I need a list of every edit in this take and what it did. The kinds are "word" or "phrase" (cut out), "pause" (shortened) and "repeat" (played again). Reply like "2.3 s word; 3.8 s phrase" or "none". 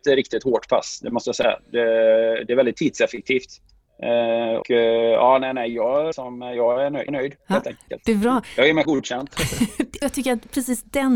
4.6 s word; 6.1 s word; 7.1 s word; 8.8 s word; 10.0 s word